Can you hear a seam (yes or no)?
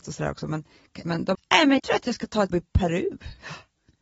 yes